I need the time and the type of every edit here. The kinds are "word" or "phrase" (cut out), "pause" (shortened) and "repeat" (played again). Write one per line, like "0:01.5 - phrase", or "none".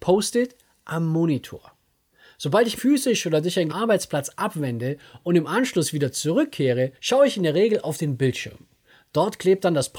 0:02.8 - word
0:03.7 - phrase
0:06.9 - pause